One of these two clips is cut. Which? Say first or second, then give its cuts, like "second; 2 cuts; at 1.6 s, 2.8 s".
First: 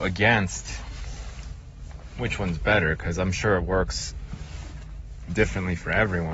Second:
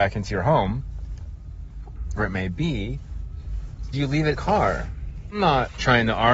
second; 3 cuts; at 2.2 s, 3.9 s, 4.3 s